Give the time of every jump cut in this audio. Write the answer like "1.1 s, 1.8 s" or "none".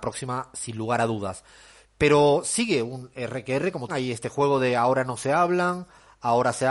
3.9 s